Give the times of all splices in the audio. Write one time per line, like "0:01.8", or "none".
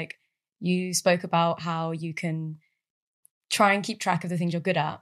none